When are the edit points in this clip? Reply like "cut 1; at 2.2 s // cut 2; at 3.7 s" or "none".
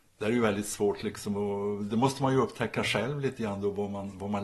none